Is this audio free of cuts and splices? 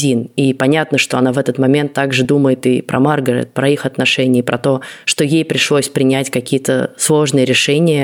yes; 0 cuts

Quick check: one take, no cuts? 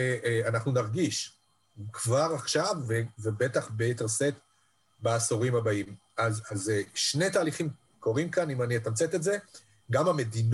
yes; 0 cuts

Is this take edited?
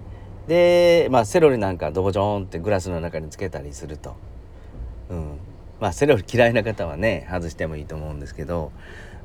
no; 0 cuts

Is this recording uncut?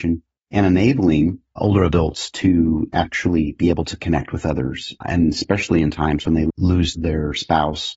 yes; 0 cuts

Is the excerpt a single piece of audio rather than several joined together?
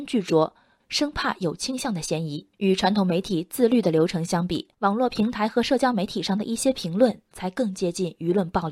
no; 2 cuts; at 2.5 s, 4.7 s

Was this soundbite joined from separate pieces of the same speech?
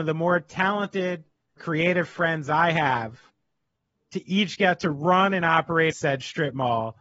yes; 2 cuts; at 1.6 s, 5.9 s

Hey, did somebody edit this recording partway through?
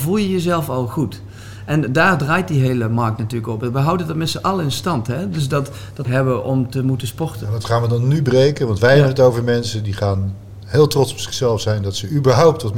yes; 1 cut; at 6.0 s

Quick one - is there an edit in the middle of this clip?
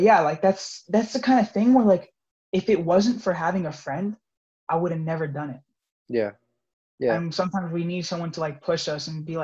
no; 0 cuts

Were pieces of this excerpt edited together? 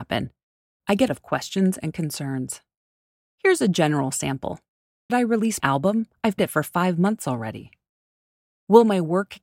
yes; 4 cuts; at 1.1 s, 5.1 s, 5.6 s, 6.4 s

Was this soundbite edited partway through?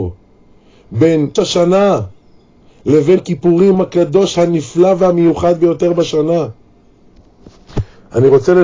yes; 3 cuts; at 1.4 s, 3.2 s, 3.7 s

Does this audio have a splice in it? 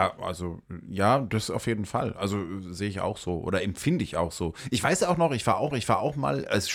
yes; 1 cut; at 5.7 s

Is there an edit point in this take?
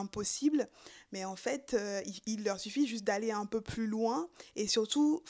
no; 0 cuts

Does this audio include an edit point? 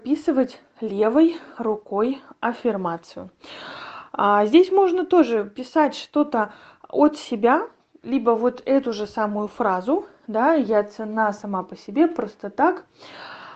no; 0 cuts

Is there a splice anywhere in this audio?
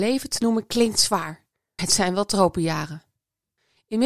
yes; 1 cut; at 1.8 s

